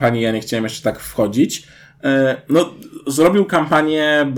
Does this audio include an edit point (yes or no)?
no